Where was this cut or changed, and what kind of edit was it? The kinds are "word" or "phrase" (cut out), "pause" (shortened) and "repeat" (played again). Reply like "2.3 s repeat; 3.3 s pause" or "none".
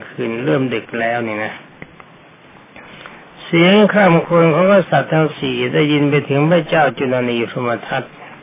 none